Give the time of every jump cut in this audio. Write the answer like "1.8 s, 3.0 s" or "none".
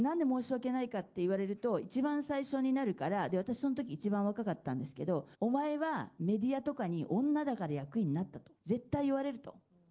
5.3 s, 8.6 s